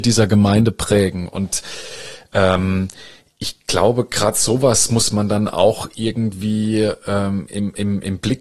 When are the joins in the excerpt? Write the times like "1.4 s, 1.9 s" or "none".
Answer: none